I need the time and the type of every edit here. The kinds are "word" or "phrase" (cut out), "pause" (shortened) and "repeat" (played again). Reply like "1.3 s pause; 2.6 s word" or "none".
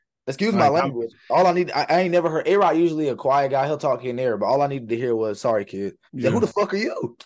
6.1 s pause